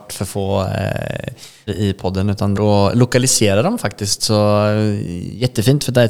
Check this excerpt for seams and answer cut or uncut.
cut